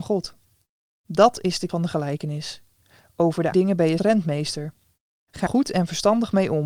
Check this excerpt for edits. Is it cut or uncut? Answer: cut